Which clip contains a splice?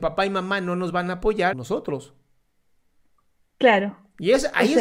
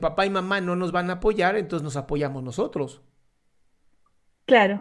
first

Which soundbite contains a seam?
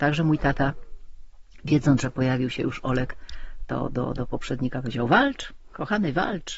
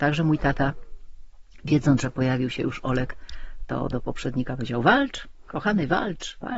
second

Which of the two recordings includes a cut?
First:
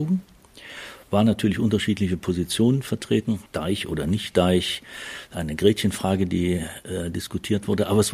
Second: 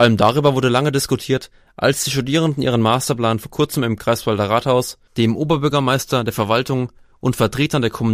first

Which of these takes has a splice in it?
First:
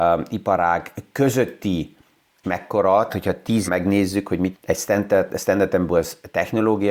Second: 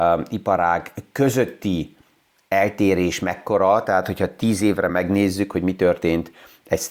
first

